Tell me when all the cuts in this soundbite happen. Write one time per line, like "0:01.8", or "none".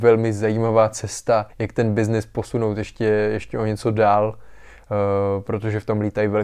0:01.5